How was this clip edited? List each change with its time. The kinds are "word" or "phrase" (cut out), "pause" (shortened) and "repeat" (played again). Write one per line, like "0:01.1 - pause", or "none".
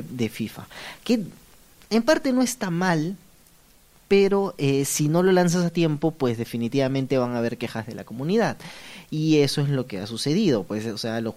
none